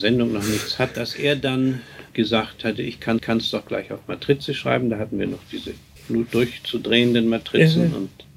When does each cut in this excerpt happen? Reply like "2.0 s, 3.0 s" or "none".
0.9 s, 3.2 s